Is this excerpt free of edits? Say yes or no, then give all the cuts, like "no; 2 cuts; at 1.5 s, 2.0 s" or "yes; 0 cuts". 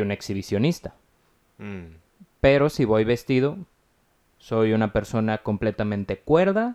yes; 0 cuts